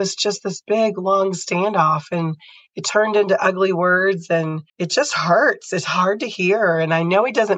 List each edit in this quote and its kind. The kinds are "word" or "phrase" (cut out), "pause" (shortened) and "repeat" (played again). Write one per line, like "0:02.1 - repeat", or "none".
0:04.7 - pause